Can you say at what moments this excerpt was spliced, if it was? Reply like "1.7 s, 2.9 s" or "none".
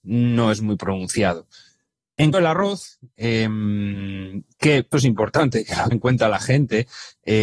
2.3 s, 4.9 s, 5.9 s